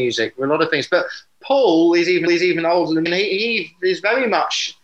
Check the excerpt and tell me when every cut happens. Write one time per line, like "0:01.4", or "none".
0:02.3
0:03.1